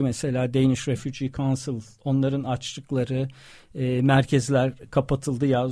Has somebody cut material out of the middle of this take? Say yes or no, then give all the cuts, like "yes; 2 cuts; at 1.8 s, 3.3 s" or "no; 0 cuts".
no; 0 cuts